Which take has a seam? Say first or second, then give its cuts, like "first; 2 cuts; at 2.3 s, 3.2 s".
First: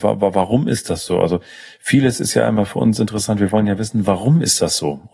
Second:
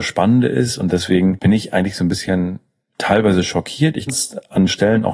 second; 1 cut; at 4.1 s